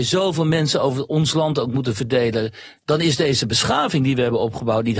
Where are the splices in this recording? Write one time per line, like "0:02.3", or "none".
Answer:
none